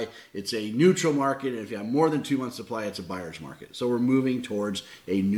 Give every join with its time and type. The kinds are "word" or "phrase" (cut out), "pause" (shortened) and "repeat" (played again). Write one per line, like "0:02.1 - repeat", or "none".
none